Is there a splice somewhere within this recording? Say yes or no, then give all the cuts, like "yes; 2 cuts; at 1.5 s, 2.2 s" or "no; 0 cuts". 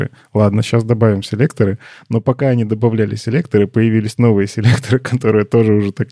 no; 0 cuts